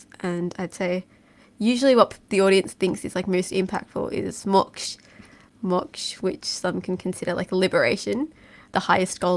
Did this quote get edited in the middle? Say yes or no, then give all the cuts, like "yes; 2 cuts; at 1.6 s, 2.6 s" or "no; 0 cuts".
no; 0 cuts